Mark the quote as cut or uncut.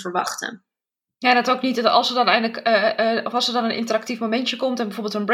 uncut